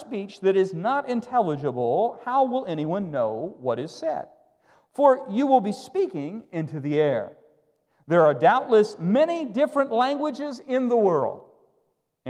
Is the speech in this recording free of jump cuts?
yes; 0 cuts

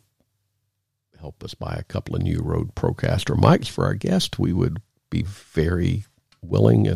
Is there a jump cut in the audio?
no; 0 cuts

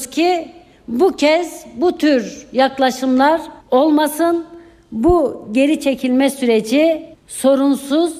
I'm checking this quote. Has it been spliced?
yes; 2 cuts; at 3.6 s, 7.1 s

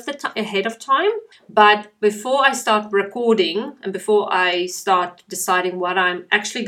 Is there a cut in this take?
yes; 1 cut; at 1.3 s

